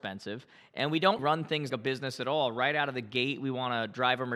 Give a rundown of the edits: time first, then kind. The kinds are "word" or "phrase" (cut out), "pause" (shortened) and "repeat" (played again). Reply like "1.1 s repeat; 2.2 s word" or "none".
1.2 s word; 1.7 s word